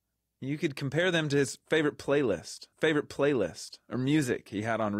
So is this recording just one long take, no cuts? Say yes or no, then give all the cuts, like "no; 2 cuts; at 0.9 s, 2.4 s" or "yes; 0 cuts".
no; 1 cut; at 2.7 s